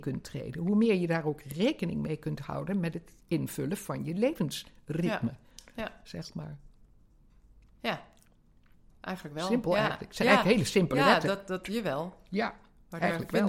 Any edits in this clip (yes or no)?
no